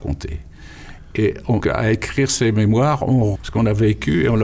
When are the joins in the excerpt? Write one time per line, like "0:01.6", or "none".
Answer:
0:01.6
0:03.4